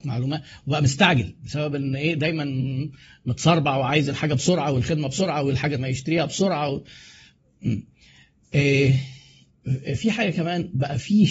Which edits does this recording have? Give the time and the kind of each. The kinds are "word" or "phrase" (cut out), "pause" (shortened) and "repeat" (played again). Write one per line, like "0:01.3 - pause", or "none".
0:05.8 - phrase